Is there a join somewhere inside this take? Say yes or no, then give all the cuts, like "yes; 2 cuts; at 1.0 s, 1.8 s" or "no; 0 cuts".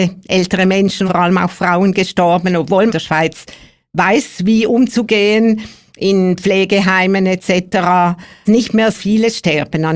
yes; 4 cuts; at 1.1 s, 2.9 s, 8.5 s, 8.9 s